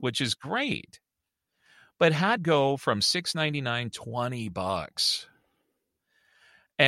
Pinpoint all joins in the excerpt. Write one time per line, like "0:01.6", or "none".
0:02.4
0:03.9